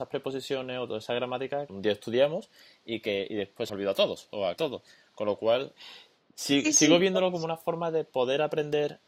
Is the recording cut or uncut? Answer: cut